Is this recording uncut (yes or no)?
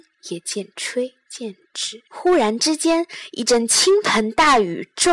no